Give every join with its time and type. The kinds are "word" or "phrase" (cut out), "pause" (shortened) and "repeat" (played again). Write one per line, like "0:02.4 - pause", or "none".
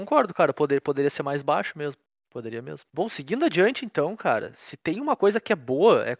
0:02.1 - pause
0:02.9 - pause